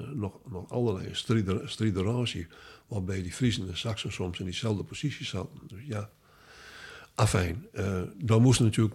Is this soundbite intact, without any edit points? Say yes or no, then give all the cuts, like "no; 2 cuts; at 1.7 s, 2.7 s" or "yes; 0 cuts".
yes; 0 cuts